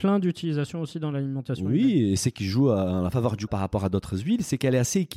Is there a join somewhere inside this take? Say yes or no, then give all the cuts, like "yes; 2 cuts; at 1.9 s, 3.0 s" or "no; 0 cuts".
yes; 1 cut; at 3.5 s